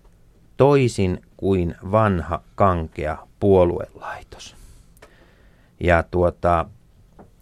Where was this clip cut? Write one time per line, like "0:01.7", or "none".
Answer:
none